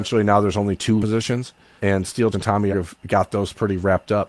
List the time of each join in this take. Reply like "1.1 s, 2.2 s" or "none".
1.0 s, 1.8 s, 2.3 s, 2.7 s